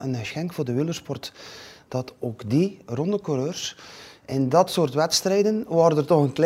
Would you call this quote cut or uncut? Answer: uncut